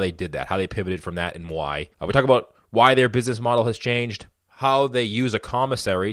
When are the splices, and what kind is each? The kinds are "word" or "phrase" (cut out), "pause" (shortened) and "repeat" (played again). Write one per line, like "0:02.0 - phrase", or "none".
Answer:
0:01.9 - pause